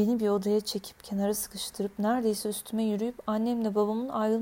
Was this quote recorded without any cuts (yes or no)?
yes